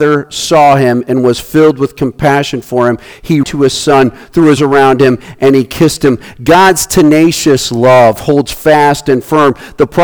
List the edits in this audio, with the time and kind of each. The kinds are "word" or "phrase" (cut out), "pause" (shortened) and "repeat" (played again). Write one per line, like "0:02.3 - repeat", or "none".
0:03.4 - word
0:04.6 - word